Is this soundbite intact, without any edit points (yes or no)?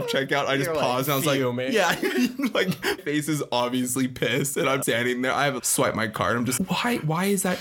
no